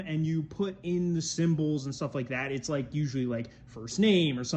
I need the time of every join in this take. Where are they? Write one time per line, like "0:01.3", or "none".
none